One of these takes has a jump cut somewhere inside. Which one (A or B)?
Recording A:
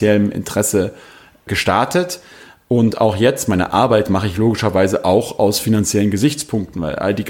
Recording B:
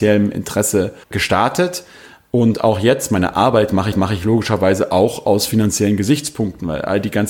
B